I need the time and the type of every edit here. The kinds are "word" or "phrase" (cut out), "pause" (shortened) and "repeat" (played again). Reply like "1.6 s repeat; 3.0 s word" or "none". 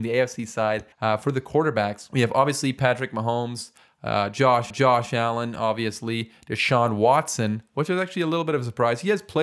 0.9 s pause; 4.7 s repeat